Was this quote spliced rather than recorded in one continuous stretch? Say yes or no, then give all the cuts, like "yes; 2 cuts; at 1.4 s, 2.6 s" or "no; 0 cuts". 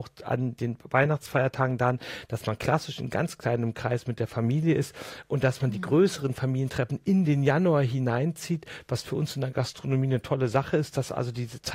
no; 0 cuts